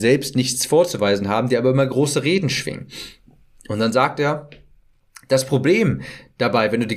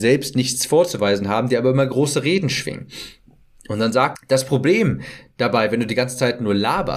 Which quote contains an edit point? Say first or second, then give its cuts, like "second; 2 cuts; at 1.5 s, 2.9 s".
second; 1 cut; at 4.2 s